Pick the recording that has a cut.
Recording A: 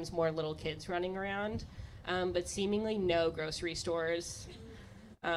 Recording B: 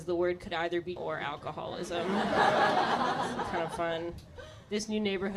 B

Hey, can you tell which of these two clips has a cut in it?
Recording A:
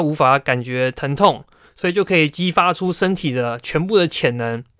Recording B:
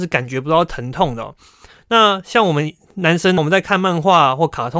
B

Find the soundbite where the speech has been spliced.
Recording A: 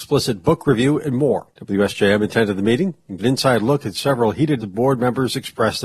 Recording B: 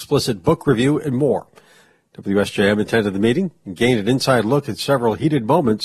A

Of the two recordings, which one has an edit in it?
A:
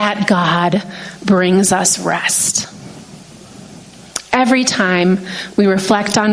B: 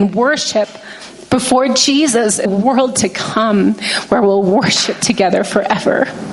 B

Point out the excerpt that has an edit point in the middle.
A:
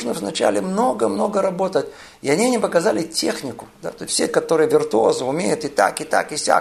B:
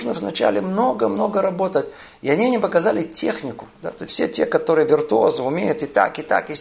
A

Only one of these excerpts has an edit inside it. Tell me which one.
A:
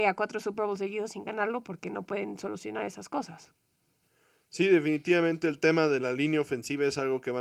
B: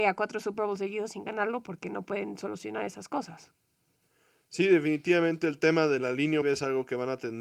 B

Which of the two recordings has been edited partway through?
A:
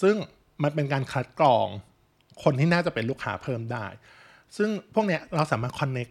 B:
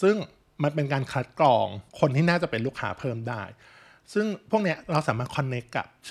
B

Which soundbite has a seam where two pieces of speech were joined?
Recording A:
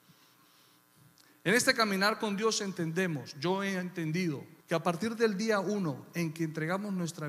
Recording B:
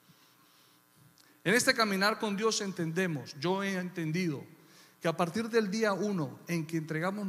A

